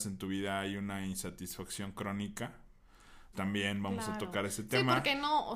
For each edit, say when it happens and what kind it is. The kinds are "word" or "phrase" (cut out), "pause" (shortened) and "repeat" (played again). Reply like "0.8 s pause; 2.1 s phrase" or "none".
3.3 s word